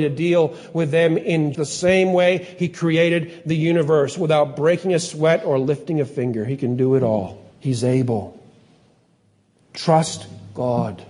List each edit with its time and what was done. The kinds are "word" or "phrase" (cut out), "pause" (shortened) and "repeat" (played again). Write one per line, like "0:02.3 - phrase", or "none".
0:01.5 - word
0:07.5 - pause